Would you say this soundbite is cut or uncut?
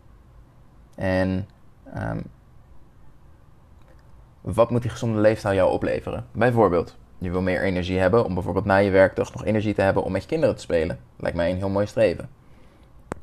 uncut